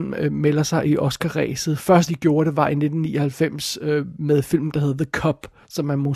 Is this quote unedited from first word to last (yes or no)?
no